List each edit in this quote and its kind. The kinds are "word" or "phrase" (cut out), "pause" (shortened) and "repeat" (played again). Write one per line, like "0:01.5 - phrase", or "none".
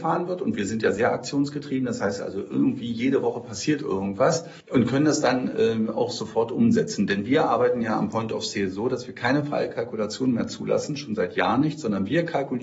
0:04.6 - pause